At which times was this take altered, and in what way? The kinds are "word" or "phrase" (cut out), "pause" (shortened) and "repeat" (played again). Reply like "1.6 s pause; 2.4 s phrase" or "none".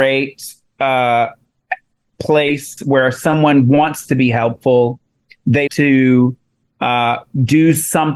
5.7 s word

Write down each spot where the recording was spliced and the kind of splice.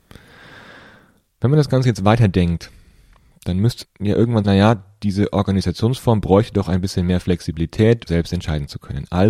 3.8 s word; 4.4 s phrase; 8.1 s word

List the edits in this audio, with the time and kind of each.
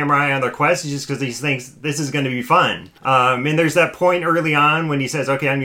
3.0 s pause

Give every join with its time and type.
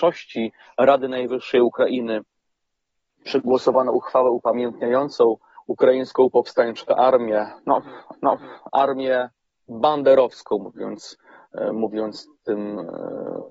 5.6 s pause; 8.1 s repeat

